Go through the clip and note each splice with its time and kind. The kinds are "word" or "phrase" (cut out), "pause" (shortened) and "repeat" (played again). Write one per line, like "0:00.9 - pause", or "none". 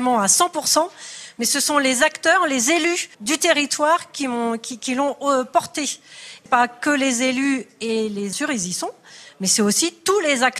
0:03.1 - pause
0:06.5 - phrase
0:08.3 - phrase